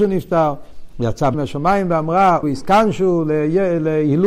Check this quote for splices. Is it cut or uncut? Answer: cut